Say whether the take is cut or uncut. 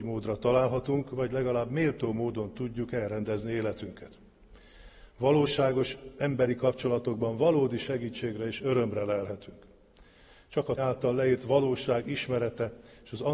cut